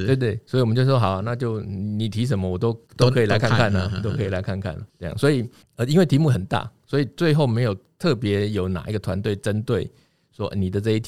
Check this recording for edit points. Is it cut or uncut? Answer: cut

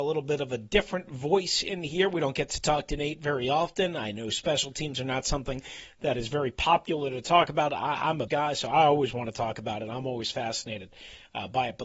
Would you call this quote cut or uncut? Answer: cut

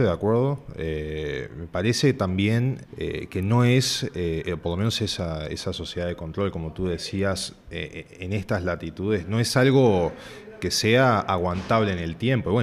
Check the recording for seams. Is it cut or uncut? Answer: cut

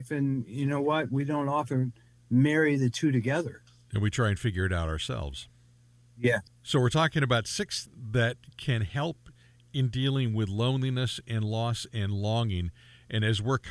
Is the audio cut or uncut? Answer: cut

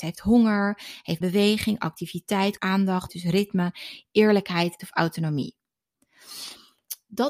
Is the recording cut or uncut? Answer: cut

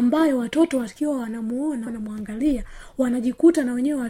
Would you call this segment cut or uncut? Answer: cut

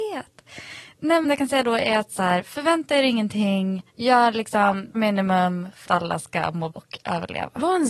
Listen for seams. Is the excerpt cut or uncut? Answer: cut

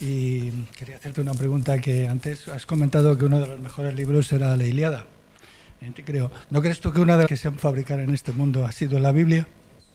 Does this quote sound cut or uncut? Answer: cut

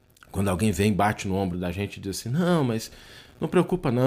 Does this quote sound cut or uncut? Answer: uncut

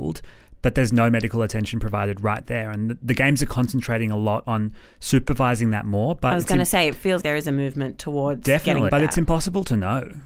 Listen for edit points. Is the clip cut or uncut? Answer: cut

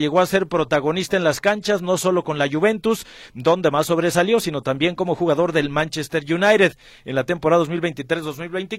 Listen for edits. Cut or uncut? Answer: uncut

